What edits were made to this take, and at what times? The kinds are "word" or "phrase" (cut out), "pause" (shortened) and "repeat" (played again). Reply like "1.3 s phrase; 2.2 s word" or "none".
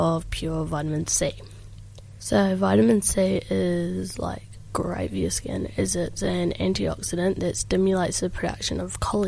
none

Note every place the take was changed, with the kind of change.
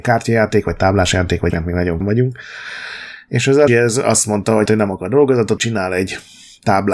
1.5 s word; 2.0 s word; 3.7 s word; 4.7 s word; 5.6 s word

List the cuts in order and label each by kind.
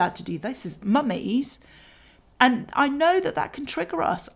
none

